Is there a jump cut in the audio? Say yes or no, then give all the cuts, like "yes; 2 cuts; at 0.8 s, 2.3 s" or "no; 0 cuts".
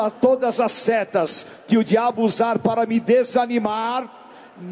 no; 0 cuts